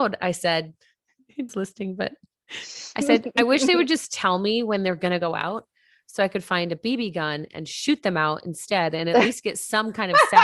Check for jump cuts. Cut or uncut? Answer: cut